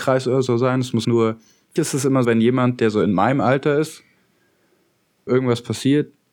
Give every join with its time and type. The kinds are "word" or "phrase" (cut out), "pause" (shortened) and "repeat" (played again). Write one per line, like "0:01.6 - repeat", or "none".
0:01.0 - word
0:01.8 - word
0:02.2 - word
0:05.3 - word